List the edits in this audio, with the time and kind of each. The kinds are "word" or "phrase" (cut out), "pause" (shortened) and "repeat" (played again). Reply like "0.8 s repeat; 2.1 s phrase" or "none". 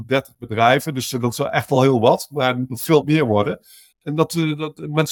none